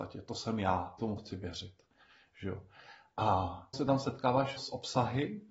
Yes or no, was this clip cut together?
yes